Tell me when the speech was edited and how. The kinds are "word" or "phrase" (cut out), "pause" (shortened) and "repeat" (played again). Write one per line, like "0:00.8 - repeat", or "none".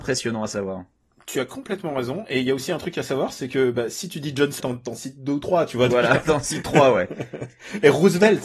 0:04.6 - word